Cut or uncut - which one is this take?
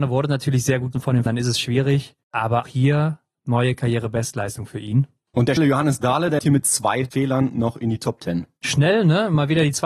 cut